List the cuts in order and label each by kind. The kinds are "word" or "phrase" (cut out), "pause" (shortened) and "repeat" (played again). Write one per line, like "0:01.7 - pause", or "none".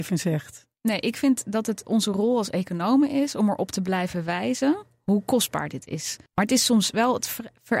0:06.3 - pause